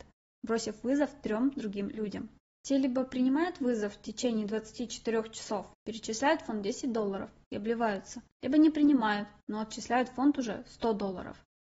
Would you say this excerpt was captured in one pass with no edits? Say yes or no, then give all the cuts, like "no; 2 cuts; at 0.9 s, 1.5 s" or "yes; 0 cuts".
no; 3 cuts; at 2.5 s, 5.7 s, 8.3 s